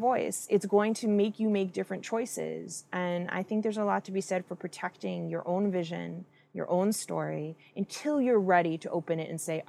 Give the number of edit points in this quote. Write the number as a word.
zero